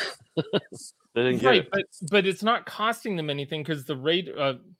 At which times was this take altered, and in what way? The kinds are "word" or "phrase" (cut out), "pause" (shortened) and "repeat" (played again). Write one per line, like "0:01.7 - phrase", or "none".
none